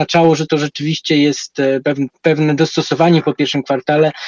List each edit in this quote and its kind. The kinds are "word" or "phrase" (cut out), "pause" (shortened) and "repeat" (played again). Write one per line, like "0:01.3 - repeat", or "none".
0:02.1 - word